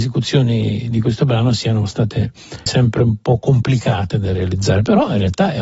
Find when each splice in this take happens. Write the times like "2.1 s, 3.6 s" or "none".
2.7 s